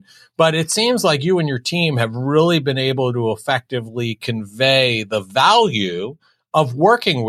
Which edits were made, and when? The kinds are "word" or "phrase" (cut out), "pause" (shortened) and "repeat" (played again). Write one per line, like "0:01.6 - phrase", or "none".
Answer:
none